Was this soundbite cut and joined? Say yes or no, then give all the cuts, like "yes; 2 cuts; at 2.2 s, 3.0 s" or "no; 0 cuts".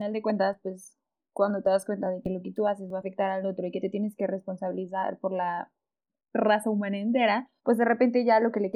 yes; 1 cut; at 7.6 s